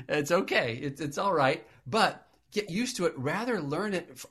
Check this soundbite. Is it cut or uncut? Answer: uncut